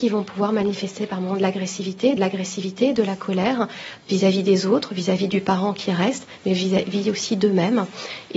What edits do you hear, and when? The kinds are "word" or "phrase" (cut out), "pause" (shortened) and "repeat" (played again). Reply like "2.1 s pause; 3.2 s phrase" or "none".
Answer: 2.2 s repeat